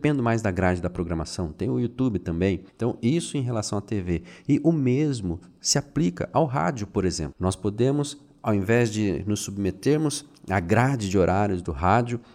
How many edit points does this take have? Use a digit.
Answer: 1